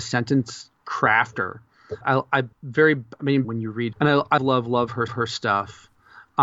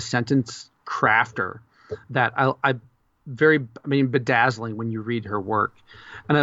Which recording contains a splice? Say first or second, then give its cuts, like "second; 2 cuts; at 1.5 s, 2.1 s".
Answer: first; 6 cuts; at 2.0 s, 2.5 s, 3.4 s, 3.9 s, 4.4 s, 5.1 s